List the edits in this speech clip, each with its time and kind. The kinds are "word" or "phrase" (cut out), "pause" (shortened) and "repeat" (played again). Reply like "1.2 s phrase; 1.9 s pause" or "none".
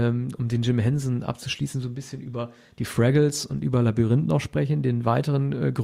none